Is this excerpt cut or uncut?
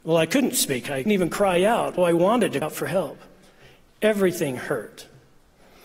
cut